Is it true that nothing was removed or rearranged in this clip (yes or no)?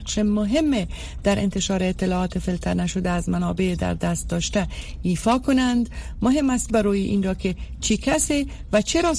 no